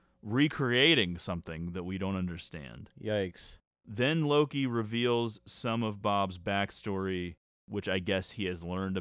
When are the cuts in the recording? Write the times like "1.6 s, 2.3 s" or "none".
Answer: none